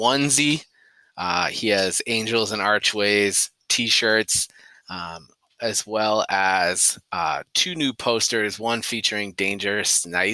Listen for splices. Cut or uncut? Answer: uncut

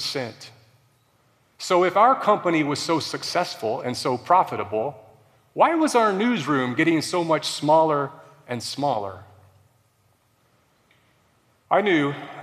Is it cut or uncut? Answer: uncut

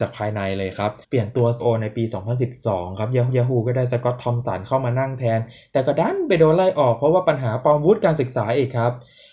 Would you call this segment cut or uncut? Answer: cut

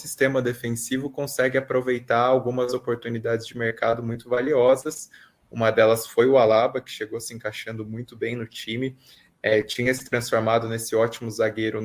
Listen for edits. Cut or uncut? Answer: uncut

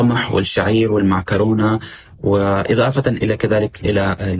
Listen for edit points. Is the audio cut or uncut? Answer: uncut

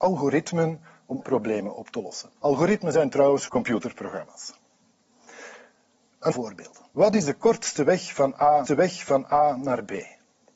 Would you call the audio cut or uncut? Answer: cut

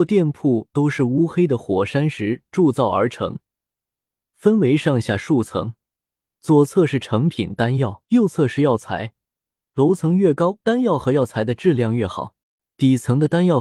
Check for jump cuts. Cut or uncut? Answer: cut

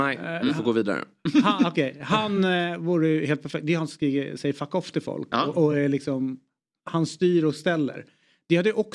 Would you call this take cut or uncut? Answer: uncut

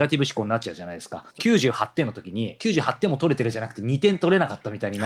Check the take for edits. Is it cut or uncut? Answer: cut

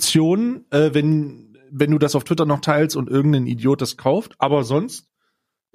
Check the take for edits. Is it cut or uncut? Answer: uncut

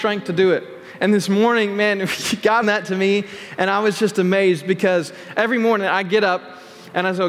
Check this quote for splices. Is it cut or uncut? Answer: cut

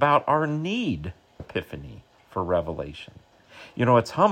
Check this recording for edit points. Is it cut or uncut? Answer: cut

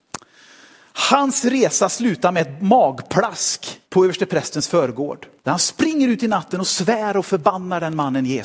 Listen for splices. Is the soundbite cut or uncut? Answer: cut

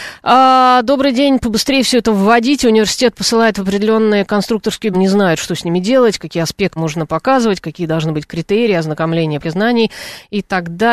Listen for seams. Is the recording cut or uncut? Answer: cut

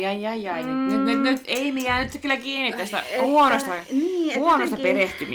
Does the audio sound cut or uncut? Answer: uncut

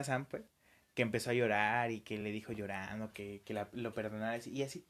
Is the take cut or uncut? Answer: uncut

